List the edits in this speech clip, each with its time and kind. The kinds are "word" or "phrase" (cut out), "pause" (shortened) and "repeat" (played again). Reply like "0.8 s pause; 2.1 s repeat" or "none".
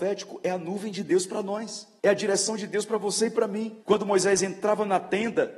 2.0 s pause; 3.8 s pause